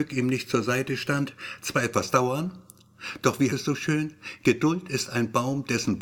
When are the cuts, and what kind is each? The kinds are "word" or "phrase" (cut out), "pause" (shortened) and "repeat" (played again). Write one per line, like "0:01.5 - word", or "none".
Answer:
0:03.5 - word